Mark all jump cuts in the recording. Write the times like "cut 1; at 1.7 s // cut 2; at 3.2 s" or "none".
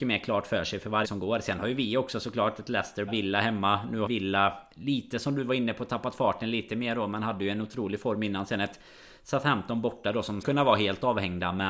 cut 1; at 1.0 s // cut 2; at 3.1 s // cut 3; at 4.1 s // cut 4; at 10.4 s